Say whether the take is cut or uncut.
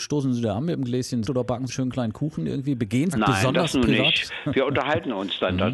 cut